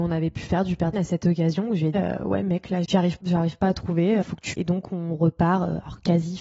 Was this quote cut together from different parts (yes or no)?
yes